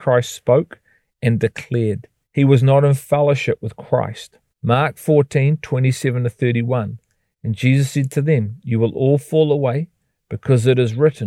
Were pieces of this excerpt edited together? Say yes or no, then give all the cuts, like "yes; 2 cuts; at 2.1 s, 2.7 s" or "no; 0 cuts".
yes; 2 cuts; at 2.2 s, 4.5 s